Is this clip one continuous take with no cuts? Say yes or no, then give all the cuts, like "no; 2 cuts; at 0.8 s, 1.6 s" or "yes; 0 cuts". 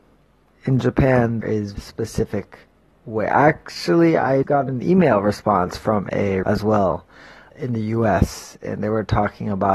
no; 5 cuts; at 1.4 s, 1.7 s, 4.4 s, 6.4 s, 7.5 s